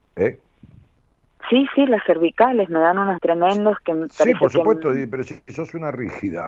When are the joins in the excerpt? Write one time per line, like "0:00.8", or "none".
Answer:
0:03.2